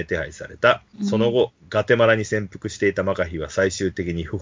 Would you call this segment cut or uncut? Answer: cut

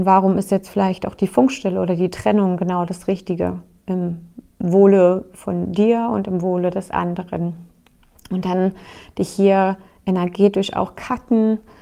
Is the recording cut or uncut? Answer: uncut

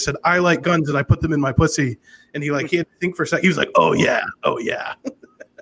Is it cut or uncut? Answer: uncut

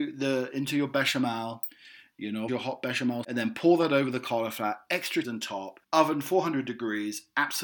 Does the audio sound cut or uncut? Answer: cut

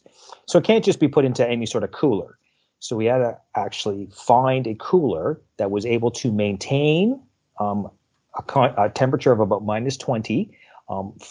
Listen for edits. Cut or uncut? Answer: uncut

